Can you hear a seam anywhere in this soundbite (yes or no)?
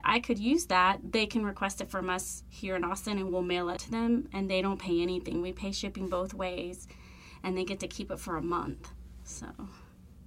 yes